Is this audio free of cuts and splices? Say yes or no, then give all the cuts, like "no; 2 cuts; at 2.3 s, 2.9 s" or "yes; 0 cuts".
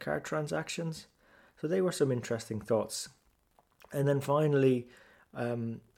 yes; 0 cuts